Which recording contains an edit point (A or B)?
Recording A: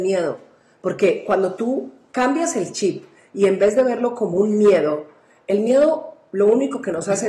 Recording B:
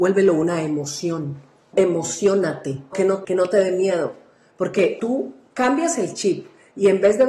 B